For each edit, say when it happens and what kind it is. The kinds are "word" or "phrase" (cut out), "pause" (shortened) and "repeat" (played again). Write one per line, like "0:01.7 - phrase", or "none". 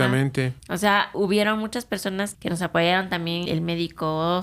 0:01.1 - word
0:02.3 - word
0:03.5 - word